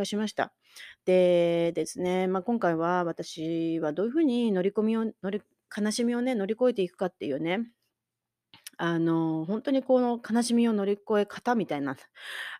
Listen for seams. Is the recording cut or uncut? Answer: uncut